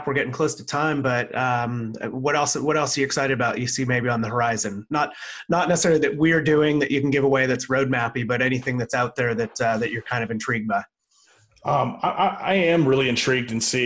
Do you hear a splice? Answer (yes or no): no